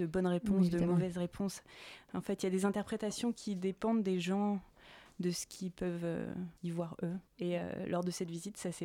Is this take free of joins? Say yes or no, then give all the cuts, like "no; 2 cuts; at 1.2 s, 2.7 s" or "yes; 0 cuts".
no; 2 cuts; at 6.6 s, 7.3 s